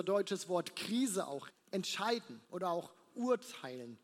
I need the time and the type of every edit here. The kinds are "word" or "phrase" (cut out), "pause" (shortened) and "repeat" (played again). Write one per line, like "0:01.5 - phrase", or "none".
0:01.5 - word
0:02.4 - pause